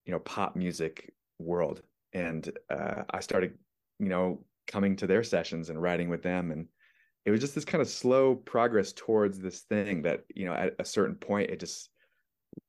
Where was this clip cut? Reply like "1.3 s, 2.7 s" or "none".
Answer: none